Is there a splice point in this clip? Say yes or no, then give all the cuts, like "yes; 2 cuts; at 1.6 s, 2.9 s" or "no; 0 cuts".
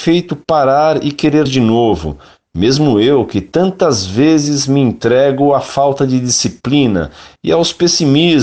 yes; 1 cut; at 1.5 s